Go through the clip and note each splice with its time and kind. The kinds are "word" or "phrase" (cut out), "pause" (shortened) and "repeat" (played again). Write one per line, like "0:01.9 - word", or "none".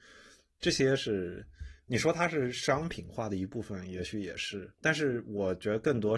0:04.7 - pause